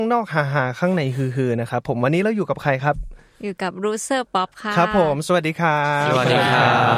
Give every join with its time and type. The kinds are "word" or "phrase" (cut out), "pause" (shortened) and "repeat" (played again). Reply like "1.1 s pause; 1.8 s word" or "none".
none